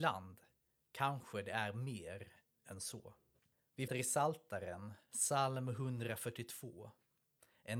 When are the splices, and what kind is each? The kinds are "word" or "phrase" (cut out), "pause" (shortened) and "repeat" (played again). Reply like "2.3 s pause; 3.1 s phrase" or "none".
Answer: 3.9 s word